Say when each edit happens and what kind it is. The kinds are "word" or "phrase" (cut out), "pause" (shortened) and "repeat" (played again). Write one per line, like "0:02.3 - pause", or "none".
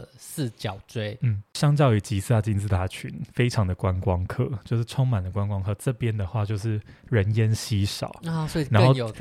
0:01.5 - pause
0:03.3 - pause